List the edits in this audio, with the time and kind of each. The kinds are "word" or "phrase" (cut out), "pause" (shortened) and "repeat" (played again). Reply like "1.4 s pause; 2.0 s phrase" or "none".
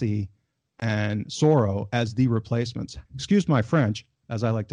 3.1 s pause